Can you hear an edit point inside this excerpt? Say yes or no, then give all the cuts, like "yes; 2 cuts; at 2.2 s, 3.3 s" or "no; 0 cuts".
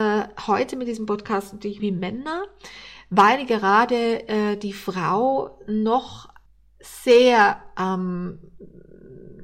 yes; 2 cuts; at 1.8 s, 6.5 s